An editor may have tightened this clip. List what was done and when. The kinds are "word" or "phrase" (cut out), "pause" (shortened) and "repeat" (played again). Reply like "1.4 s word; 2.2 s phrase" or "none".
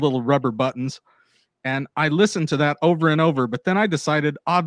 none